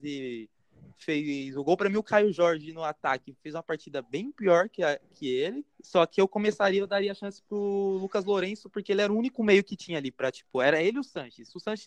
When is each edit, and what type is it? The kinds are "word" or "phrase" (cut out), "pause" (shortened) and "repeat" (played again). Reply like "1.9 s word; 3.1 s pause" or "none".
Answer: 5.7 s pause